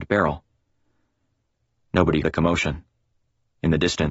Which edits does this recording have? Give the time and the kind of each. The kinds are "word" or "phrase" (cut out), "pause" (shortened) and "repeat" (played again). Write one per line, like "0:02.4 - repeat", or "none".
0:02.2 - word